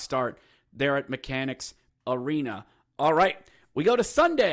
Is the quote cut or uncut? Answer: cut